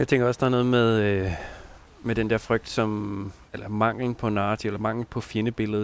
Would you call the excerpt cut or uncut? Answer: cut